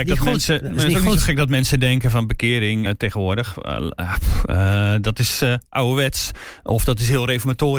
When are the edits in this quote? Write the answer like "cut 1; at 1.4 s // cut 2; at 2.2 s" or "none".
cut 1; at 2.9 s